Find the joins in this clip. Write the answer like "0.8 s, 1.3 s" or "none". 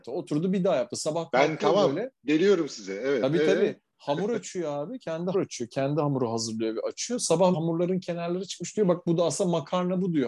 5.3 s, 7.5 s